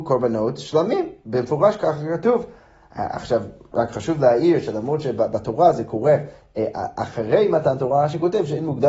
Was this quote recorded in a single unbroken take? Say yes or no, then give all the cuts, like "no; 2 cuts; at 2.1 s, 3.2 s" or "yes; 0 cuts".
yes; 0 cuts